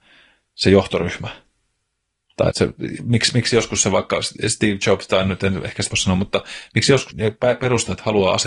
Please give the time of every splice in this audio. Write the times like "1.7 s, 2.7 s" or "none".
2.5 s, 5.9 s, 7.1 s